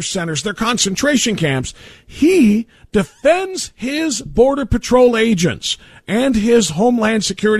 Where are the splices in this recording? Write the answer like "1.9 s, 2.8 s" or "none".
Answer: none